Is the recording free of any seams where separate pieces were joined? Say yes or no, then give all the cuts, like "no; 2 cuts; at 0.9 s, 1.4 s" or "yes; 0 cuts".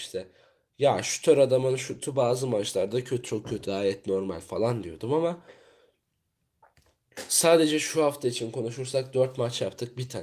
no; 2 cuts; at 3.2 s, 3.6 s